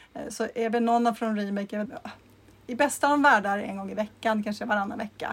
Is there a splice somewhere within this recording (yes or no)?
yes